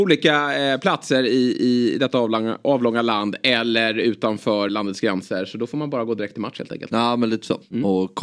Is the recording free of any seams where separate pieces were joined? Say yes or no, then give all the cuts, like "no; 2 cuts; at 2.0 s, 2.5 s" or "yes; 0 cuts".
no; 1 cut; at 4.7 s